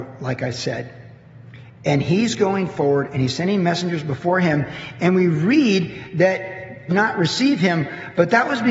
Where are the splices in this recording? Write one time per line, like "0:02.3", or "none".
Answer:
0:06.9

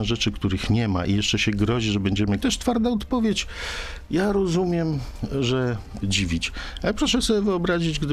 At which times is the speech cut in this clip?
0:02.4
0:06.0

